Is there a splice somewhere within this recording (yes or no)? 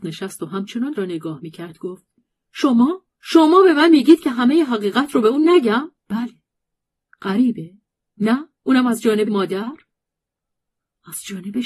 yes